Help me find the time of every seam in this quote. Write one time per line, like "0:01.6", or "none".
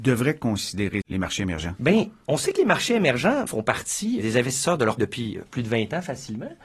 0:01.0
0:03.5
0:05.0